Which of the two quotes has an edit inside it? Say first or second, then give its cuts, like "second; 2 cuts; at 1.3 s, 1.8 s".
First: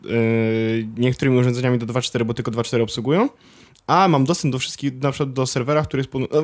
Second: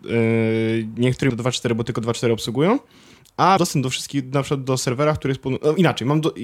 second; 2 cuts; at 1.3 s, 3.6 s